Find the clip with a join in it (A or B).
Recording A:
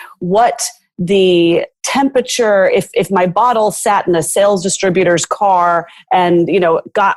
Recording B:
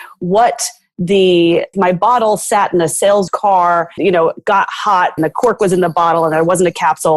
B